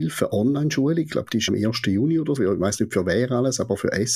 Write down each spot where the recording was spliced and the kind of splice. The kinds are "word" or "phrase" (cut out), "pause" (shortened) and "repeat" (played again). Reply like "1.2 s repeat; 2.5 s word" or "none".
1.5 s word; 2.4 s word